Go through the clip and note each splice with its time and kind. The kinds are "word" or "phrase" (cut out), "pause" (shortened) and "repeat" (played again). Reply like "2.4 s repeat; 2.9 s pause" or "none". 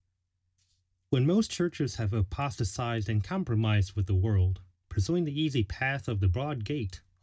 4.8 s pause